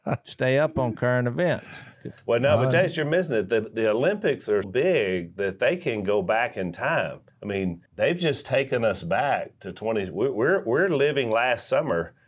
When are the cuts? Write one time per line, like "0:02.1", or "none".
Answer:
0:04.6
0:07.3
0:07.9